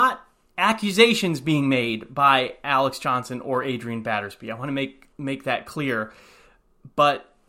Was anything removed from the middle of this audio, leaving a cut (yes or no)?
yes